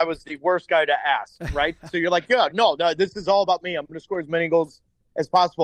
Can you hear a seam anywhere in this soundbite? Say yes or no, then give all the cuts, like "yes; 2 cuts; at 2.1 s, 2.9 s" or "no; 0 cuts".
no; 0 cuts